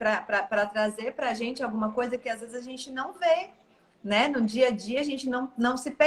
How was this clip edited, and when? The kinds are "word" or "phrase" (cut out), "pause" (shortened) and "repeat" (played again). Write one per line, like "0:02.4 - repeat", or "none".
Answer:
none